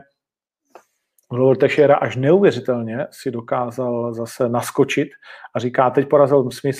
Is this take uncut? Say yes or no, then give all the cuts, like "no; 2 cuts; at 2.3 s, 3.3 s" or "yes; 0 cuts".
yes; 0 cuts